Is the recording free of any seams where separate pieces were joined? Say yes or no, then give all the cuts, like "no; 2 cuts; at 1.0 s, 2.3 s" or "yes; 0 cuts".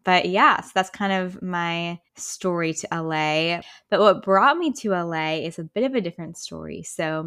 no; 1 cut; at 2.1 s